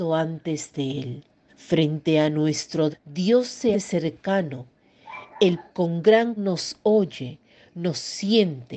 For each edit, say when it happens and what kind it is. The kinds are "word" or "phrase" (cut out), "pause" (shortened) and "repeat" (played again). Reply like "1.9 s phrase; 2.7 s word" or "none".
1.5 s pause; 2.9 s word; 3.7 s word; 5.7 s word; 6.4 s word